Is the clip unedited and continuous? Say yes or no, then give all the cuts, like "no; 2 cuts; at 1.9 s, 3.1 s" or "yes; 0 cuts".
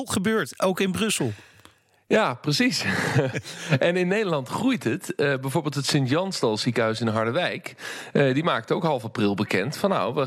yes; 0 cuts